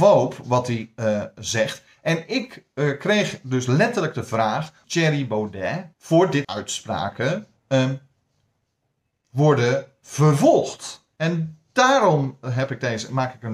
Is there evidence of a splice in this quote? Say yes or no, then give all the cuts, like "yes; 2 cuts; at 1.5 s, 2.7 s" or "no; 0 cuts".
yes; 5 cuts; at 4.8 s, 5.9 s, 6.4 s, 7.6 s, 11.1 s